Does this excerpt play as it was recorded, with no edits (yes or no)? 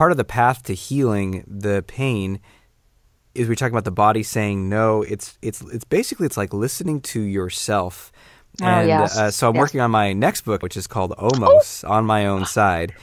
no